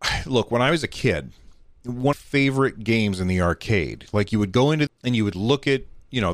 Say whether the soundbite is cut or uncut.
cut